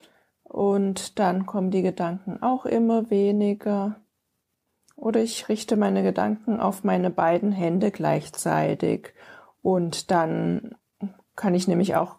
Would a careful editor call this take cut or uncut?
uncut